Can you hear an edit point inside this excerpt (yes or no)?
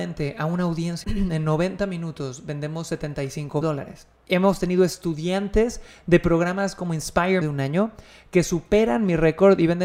yes